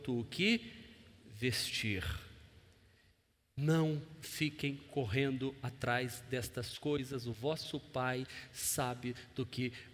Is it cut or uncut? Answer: cut